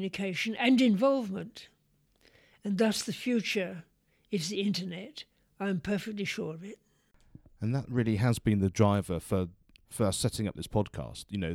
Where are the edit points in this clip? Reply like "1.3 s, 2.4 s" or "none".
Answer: none